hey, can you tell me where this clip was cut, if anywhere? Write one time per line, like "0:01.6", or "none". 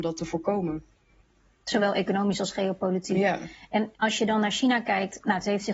0:03.9